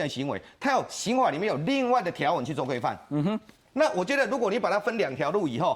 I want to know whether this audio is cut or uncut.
uncut